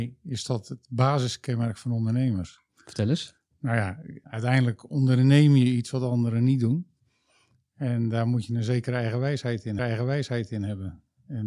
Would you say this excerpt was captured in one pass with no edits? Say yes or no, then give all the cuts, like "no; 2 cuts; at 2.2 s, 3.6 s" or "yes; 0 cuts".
no; 2 cuts; at 4.2 s, 9.8 s